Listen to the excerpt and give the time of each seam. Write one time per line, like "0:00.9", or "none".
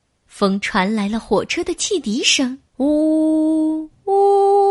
0:02.7